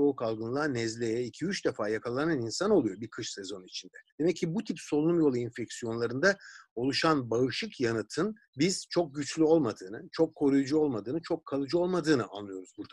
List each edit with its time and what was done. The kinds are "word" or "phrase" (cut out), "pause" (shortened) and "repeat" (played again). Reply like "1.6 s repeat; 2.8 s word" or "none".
4.1 s pause; 8.4 s pause